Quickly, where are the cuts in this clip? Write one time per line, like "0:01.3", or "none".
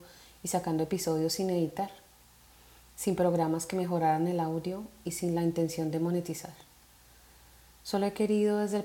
none